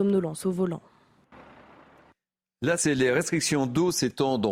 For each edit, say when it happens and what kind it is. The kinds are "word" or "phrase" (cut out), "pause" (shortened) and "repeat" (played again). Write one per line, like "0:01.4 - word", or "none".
0:02.8 - word